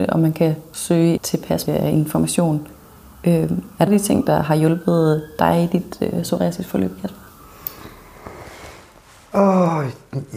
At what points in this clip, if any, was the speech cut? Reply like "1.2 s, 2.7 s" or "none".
1.2 s, 1.7 s, 3.9 s